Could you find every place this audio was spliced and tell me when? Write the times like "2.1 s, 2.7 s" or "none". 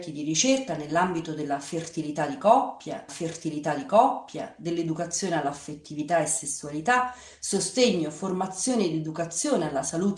3.1 s